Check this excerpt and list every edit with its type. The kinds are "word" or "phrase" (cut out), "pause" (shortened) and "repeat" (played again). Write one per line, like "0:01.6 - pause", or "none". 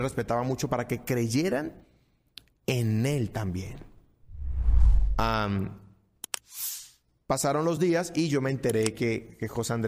none